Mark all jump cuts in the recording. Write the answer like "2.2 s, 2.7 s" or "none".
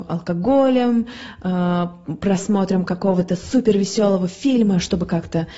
none